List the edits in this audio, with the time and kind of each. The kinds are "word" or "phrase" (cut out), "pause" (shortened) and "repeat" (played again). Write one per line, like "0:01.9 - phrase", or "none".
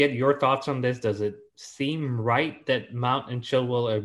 0:01.5 - pause